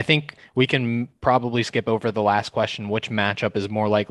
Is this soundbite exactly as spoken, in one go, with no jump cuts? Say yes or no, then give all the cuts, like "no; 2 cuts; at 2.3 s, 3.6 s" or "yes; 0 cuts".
yes; 0 cuts